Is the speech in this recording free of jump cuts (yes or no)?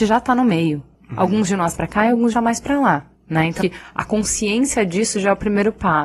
no